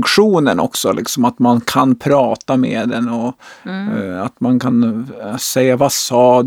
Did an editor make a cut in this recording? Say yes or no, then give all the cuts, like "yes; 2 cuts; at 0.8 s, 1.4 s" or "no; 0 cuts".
no; 0 cuts